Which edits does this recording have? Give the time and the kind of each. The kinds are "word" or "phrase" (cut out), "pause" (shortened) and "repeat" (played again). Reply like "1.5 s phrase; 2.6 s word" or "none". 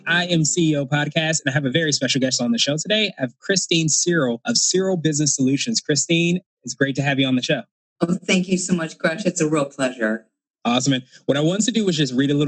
none